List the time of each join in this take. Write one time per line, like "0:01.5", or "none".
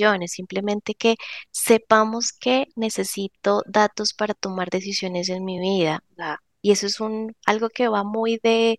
none